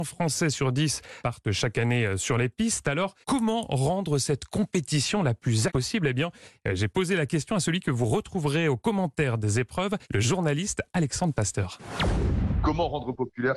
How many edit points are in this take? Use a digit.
4